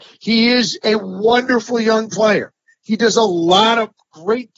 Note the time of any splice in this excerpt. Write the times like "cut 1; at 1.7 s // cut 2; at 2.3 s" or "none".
none